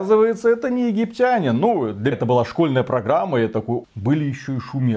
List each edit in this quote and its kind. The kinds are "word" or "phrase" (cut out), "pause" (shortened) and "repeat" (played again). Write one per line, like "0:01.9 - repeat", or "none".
0:02.1 - word
0:03.8 - word